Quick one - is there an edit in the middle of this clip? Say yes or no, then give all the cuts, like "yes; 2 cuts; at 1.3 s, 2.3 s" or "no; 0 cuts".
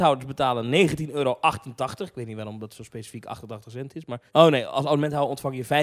no; 0 cuts